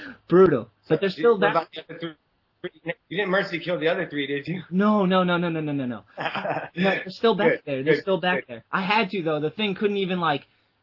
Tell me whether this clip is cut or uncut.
uncut